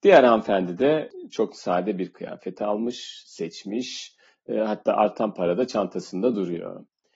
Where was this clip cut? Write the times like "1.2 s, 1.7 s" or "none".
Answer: none